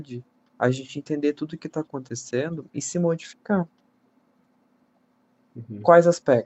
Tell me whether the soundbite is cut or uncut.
uncut